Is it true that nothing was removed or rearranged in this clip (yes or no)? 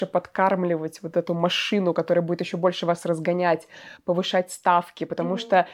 yes